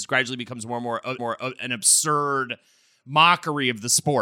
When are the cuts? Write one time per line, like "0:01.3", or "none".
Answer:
0:01.2